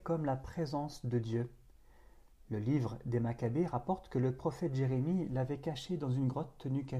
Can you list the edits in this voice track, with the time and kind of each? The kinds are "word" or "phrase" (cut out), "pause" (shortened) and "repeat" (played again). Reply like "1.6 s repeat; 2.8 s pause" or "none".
none